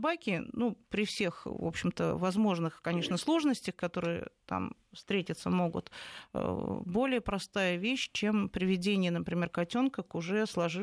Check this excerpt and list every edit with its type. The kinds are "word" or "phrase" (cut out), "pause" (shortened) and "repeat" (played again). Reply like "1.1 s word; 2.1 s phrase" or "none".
none